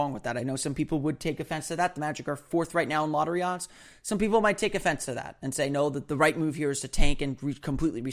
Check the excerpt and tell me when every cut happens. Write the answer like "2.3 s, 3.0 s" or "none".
none